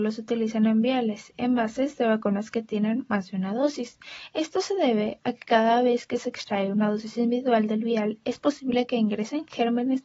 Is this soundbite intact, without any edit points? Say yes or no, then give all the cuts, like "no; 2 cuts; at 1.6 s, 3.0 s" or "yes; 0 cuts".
yes; 0 cuts